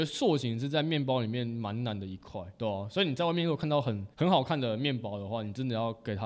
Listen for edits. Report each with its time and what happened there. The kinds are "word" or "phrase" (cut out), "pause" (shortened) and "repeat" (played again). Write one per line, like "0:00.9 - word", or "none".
0:02.6 - word
0:04.1 - pause